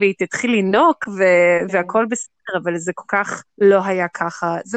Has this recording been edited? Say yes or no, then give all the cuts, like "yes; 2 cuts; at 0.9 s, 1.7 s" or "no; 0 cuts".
yes; 1 cut; at 3.5 s